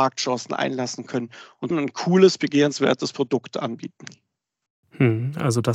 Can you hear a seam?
yes; 1 cut; at 1.7 s

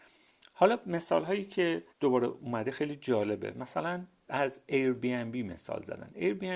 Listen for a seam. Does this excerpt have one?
yes; 1 cut; at 1.9 s

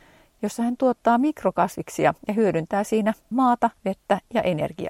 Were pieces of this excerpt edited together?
yes; 3 cuts; at 2.2 s, 3.3 s, 3.8 s

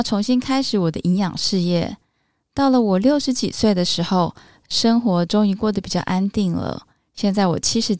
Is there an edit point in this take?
no; 0 cuts

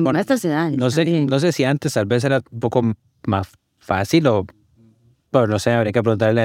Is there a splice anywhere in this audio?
no; 0 cuts

